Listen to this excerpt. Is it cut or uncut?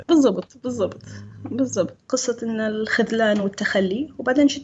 uncut